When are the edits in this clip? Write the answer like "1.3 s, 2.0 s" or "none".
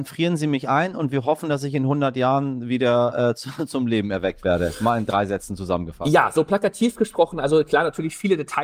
none